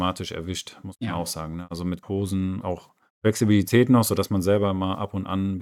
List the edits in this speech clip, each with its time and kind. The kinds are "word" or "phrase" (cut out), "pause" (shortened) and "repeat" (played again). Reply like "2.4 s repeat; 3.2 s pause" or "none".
2.0 s word; 2.6 s word